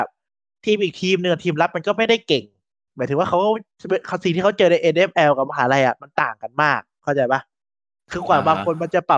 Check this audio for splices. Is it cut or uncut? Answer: uncut